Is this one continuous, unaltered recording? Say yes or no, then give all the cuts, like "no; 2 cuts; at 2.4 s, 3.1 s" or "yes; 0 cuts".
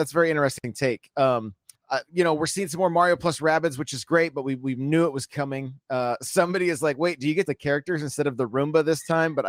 no; 2 cuts; at 1.7 s, 7.4 s